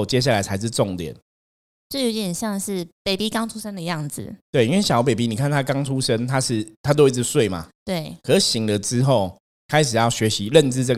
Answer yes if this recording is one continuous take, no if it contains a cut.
yes